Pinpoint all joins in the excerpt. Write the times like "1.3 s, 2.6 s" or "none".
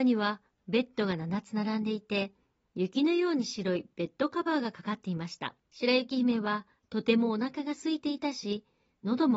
5.6 s